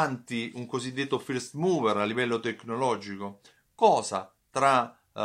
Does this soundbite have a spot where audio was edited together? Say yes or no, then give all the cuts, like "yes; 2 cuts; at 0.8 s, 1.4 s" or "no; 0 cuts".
no; 0 cuts